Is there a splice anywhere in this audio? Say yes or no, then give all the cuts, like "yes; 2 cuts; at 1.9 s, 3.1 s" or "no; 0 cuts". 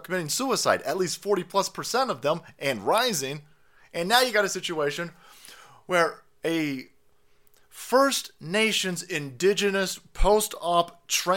no; 0 cuts